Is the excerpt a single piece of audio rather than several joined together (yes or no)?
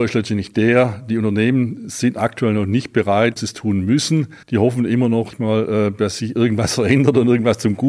no